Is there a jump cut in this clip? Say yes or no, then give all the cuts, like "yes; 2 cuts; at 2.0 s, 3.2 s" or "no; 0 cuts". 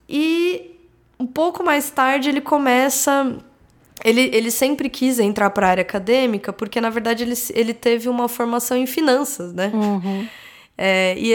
no; 0 cuts